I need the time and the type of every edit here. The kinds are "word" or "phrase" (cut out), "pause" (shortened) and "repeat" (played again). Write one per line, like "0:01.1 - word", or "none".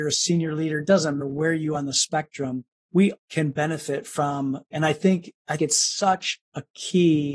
0:01.2 - word
0:01.7 - word
0:03.2 - word
0:04.7 - word
0:05.6 - word